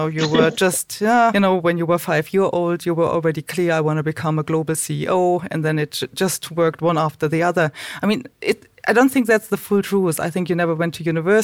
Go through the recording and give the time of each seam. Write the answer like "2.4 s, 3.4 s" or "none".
1.3 s, 8.8 s

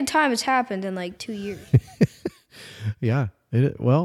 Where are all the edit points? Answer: 1.2 s

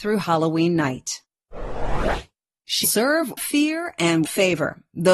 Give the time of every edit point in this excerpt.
2.8 s, 3.4 s, 4.2 s

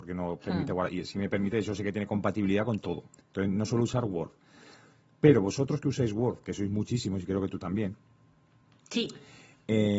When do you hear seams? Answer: none

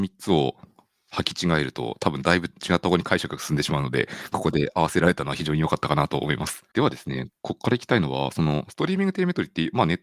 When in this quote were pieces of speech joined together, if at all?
2.5 s, 6.7 s, 7.4 s

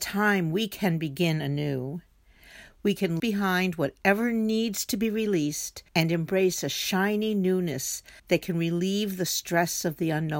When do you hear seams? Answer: 3.2 s, 5.9 s, 8.2 s

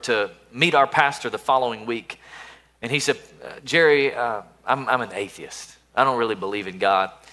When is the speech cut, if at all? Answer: none

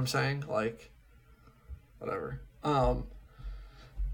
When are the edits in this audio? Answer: 1.9 s

